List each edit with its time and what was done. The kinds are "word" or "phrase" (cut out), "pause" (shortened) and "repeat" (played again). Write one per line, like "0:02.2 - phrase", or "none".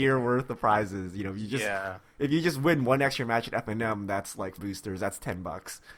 0:04.6 - phrase